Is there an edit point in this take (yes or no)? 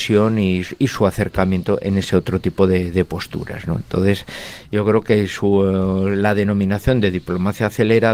no